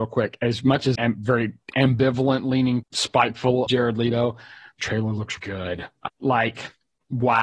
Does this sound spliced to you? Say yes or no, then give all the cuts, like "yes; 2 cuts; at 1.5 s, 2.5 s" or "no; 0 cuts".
yes; 6 cuts; at 0.9 s, 2.8 s, 3.7 s, 4.8 s, 5.4 s, 6.1 s